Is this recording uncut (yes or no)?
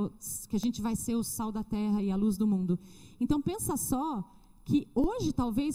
yes